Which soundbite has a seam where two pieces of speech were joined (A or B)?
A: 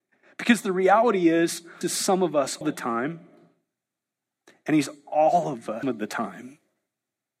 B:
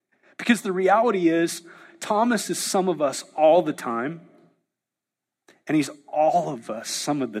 A